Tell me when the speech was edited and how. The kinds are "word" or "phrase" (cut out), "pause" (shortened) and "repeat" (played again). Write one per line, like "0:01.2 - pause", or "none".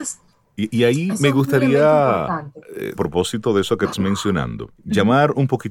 0:03.0 - phrase
0:03.9 - word
0:04.8 - pause